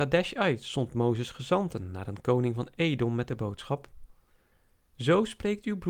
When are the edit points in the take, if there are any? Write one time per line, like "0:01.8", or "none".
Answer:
none